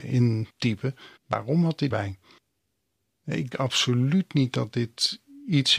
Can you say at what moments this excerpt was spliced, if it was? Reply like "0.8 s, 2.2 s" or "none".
1.2 s, 1.9 s, 3.5 s